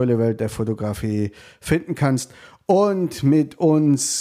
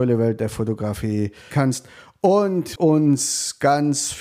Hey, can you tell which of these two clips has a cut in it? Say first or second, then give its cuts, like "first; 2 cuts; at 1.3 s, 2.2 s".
second; 2 cuts; at 1.5 s, 2.8 s